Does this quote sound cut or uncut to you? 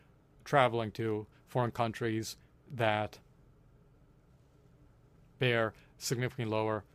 uncut